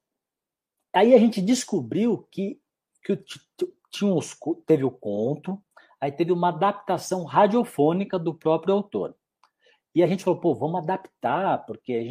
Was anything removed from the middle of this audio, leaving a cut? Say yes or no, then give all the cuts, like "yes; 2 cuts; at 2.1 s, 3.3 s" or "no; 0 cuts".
no; 0 cuts